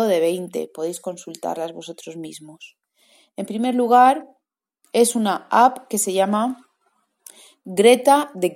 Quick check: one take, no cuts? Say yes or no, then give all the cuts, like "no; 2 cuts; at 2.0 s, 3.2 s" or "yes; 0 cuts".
yes; 0 cuts